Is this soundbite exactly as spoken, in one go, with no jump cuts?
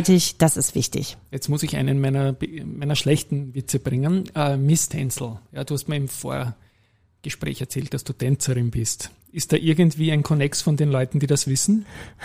yes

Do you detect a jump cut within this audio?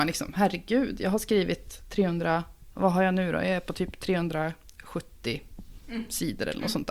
no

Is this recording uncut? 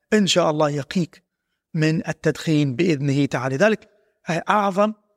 yes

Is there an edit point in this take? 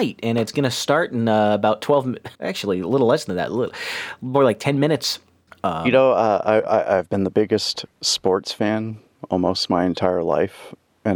yes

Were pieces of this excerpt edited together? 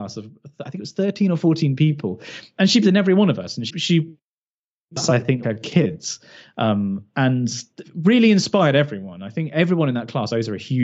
yes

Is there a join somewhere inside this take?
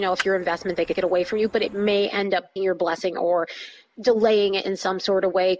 yes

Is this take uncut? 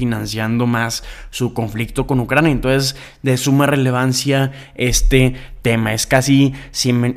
yes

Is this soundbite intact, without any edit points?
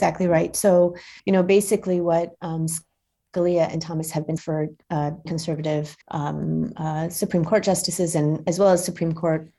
no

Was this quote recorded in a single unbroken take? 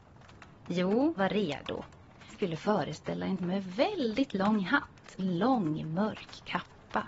no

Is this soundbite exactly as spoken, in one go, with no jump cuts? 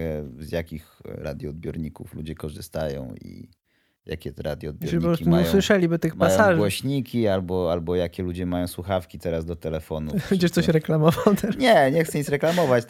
yes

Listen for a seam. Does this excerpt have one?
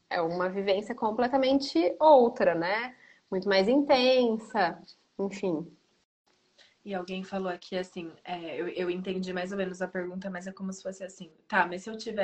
no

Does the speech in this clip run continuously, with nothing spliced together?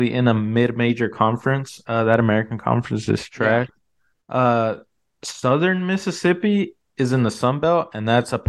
yes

